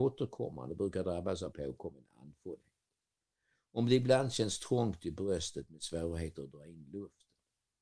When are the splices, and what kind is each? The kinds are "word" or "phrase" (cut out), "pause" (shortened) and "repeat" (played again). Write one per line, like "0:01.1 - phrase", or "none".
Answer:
0:01.5 - word